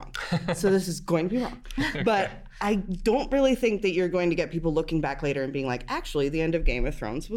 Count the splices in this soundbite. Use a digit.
0